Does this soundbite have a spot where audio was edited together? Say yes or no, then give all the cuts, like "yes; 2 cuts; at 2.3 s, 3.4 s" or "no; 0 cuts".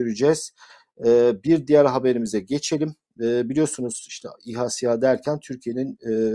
no; 0 cuts